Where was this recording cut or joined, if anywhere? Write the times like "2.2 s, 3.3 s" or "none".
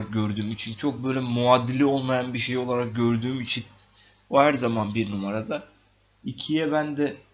none